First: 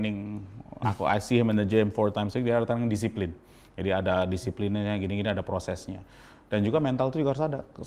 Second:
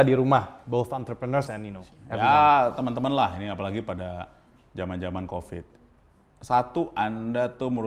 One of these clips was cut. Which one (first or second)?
second